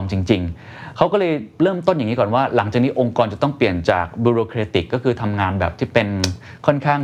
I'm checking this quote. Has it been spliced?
no; 0 cuts

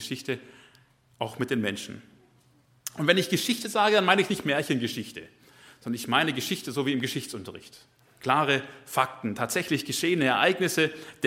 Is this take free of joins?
yes; 0 cuts

